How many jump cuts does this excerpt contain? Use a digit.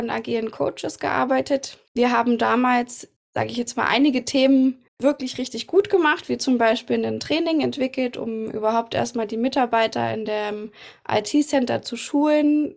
1